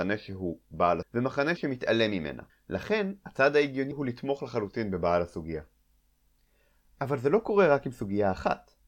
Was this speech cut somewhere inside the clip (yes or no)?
yes